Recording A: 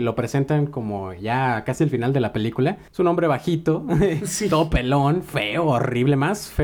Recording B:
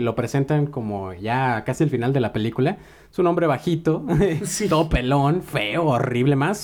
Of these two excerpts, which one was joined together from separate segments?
A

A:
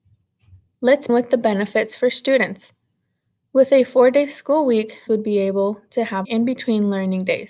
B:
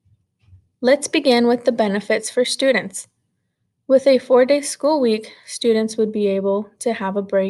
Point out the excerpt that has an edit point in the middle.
A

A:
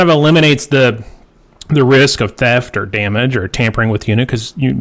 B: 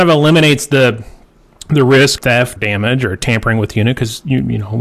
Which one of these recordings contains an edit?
B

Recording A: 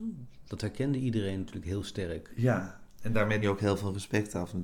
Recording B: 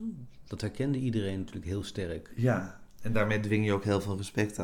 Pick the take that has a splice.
A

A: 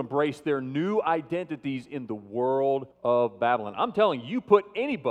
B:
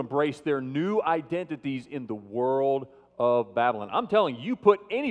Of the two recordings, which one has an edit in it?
A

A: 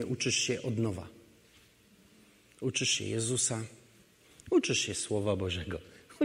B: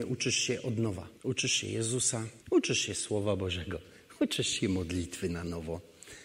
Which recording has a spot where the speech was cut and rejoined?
B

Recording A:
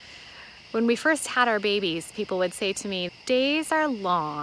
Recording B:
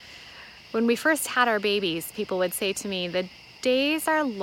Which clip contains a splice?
A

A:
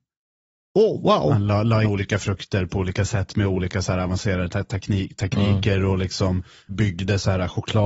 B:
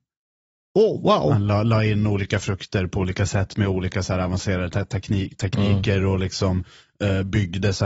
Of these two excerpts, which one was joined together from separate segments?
A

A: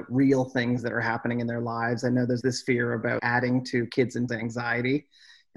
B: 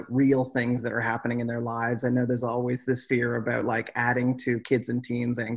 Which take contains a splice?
A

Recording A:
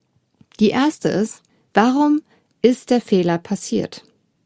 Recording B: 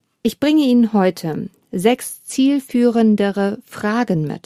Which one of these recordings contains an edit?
A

